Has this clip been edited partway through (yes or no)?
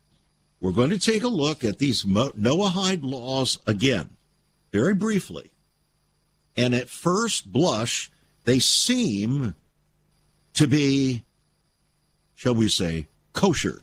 no